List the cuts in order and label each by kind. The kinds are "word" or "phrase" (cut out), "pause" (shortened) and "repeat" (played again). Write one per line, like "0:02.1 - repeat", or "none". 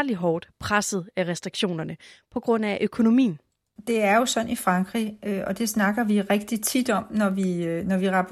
none